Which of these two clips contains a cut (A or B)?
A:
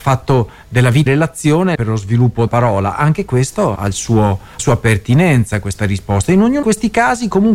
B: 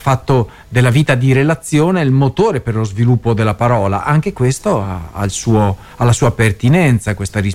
A